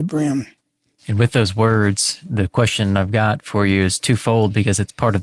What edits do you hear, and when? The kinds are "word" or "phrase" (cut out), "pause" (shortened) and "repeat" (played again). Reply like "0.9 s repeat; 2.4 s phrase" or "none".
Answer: none